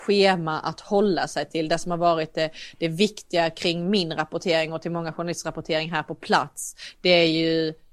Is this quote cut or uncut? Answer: uncut